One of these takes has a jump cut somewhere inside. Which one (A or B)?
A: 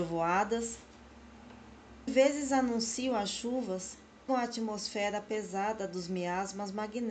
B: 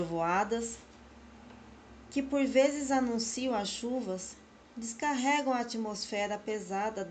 A